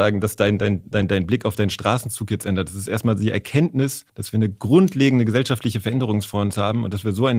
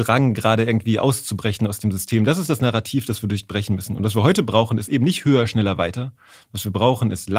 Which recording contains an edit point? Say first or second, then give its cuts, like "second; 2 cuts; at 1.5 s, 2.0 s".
first; 1 cut; at 4.1 s